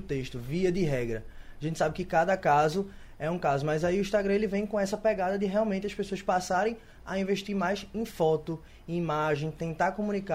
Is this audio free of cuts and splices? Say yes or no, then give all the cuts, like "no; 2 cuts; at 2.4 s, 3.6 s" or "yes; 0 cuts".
yes; 0 cuts